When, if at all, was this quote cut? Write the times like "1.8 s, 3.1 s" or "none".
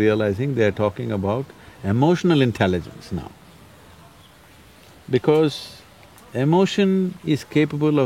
none